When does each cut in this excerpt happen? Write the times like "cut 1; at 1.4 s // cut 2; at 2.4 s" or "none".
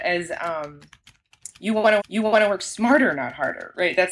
cut 1; at 2.0 s